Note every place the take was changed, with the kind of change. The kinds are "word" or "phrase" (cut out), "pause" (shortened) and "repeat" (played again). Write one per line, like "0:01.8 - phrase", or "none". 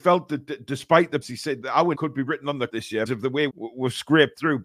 0:01.2 - word
0:01.6 - word
0:01.9 - word
0:02.7 - word
0:03.1 - word
0:03.5 - word